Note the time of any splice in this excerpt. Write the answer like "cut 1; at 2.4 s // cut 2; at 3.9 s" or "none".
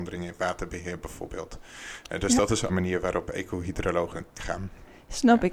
cut 1; at 2.7 s // cut 2; at 4.4 s